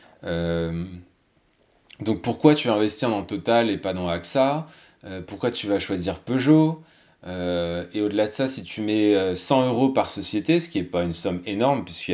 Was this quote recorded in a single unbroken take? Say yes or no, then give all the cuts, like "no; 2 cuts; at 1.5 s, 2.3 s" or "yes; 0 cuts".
yes; 0 cuts